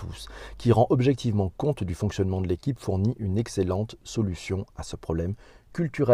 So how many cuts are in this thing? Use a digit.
0